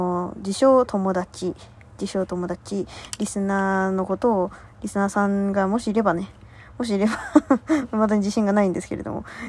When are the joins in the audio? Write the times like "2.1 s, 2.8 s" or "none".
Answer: none